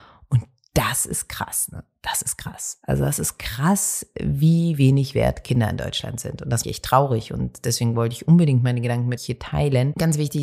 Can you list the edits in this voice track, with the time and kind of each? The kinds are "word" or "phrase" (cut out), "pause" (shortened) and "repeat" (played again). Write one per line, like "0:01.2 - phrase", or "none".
0:06.6 - phrase
0:09.2 - word